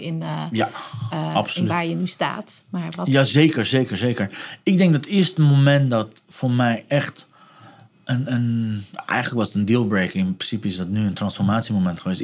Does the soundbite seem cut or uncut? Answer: uncut